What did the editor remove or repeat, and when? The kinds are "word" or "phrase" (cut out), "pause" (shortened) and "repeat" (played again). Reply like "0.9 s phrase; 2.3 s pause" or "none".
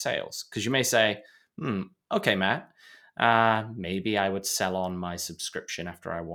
none